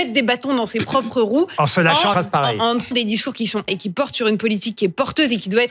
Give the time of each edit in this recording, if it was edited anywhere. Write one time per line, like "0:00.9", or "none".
0:02.1
0:02.9
0:03.7